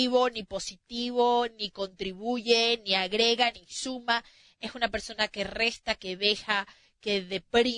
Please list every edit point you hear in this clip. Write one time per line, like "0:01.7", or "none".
none